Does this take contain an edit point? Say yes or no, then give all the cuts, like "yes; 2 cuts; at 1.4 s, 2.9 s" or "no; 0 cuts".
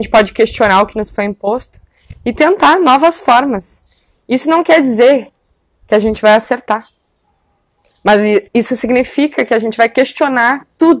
no; 0 cuts